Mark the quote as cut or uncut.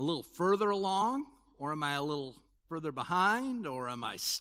uncut